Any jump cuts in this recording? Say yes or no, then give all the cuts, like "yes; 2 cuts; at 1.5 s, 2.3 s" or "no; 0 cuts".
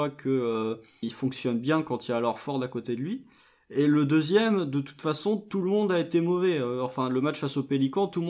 yes; 1 cut; at 1.0 s